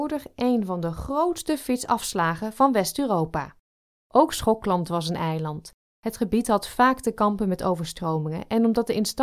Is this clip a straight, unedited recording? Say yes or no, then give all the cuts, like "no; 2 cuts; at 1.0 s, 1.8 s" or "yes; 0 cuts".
yes; 0 cuts